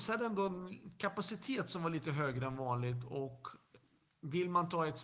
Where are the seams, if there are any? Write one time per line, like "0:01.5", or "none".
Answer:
none